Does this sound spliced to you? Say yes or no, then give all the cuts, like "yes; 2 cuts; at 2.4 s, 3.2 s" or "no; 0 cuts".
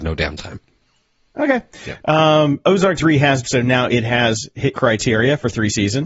yes; 3 cuts; at 3.0 s, 3.4 s, 4.7 s